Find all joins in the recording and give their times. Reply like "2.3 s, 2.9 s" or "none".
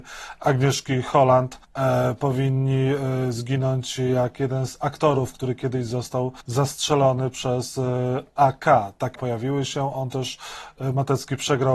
1.6 s, 6.4 s, 9.2 s

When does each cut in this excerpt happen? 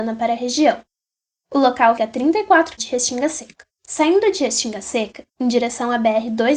2.0 s, 2.8 s, 3.7 s

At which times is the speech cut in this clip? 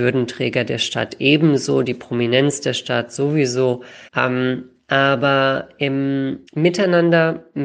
4.1 s, 6.5 s

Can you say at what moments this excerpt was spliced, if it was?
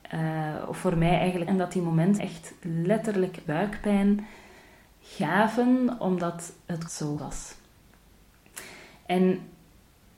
1.5 s, 2.2 s, 3.5 s, 6.9 s, 7.2 s

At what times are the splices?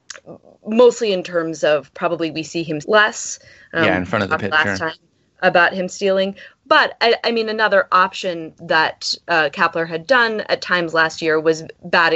2.8 s, 8.6 s

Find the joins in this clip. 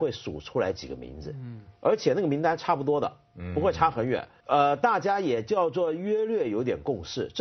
4.4 s

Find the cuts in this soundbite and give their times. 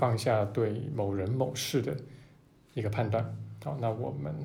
none

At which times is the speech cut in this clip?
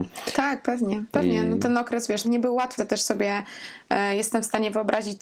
1.1 s, 2.2 s, 2.8 s

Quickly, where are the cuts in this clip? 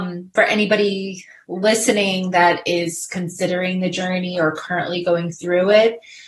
none

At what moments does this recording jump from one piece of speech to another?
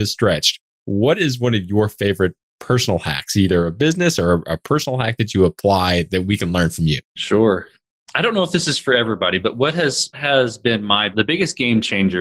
7.1 s, 10.1 s, 11.1 s

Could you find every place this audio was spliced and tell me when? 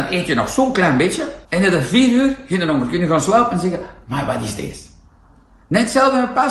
1.4 s

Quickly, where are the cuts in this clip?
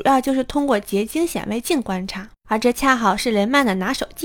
2.4 s

